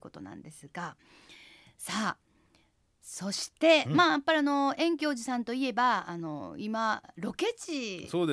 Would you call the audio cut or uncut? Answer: uncut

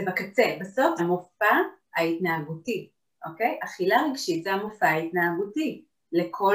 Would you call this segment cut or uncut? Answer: cut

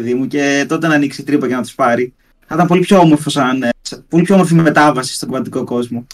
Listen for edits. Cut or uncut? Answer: uncut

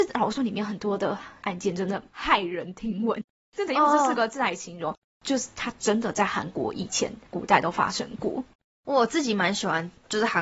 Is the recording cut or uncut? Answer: uncut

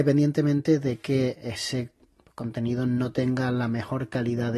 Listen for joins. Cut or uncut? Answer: uncut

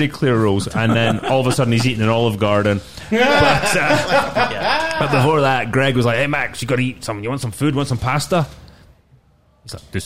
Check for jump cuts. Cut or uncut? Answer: uncut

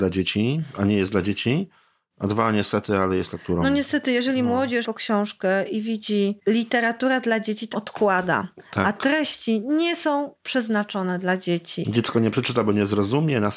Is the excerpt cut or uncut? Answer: cut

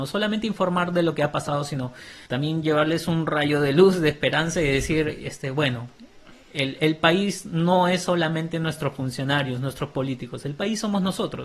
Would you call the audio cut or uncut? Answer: cut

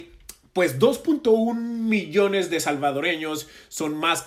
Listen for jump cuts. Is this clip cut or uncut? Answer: uncut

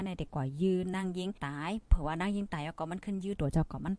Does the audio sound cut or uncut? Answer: cut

